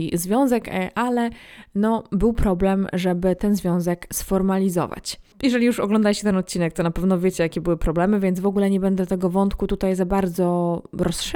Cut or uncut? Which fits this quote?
uncut